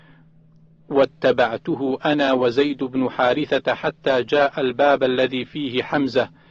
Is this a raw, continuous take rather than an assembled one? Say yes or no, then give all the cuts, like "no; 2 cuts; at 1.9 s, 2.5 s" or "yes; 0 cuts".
yes; 0 cuts